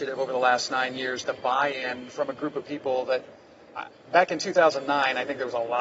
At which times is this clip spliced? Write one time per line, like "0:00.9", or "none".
0:01.2